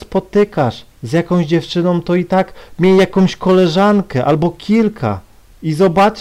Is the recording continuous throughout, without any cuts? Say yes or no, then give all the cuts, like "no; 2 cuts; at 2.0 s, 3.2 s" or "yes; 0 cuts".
no; 1 cut; at 0.9 s